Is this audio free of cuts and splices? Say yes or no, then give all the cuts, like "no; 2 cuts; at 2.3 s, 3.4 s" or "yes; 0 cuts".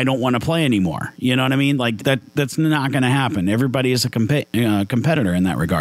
no; 1 cut; at 2.0 s